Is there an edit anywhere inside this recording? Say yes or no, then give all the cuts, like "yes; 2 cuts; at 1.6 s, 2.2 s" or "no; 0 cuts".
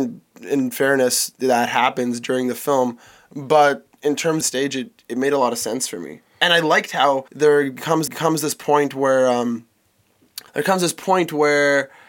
yes; 4 cuts; at 4.4 s, 7.3 s, 8.1 s, 10.5 s